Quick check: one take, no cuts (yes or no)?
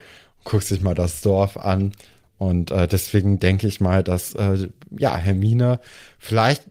yes